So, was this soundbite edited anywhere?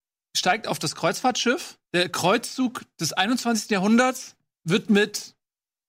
yes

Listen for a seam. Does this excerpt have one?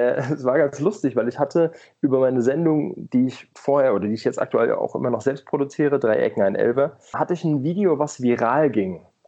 yes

